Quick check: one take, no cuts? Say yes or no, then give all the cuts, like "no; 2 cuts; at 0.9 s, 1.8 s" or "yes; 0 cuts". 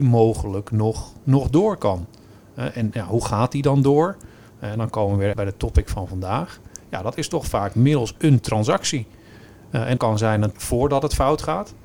no; 3 cuts; at 5.3 s, 10.0 s, 10.5 s